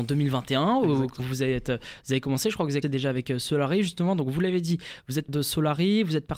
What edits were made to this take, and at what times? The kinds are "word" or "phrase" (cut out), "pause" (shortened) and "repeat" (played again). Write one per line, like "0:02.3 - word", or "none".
0:01.2 - word
0:02.8 - word
0:05.3 - word